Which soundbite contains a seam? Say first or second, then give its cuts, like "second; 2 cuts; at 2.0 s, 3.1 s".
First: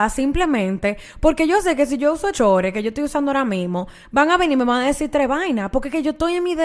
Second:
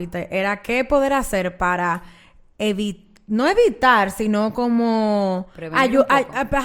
first; 1 cut; at 2.3 s